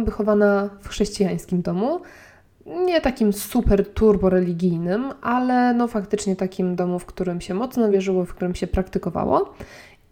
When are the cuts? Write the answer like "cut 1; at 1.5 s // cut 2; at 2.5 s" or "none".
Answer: none